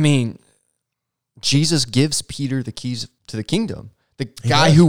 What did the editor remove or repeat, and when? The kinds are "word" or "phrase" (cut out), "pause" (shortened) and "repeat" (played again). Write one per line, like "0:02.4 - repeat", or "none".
0:03.2 - pause